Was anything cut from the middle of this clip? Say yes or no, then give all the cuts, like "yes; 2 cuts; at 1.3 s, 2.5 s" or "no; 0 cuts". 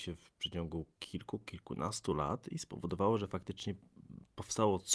no; 0 cuts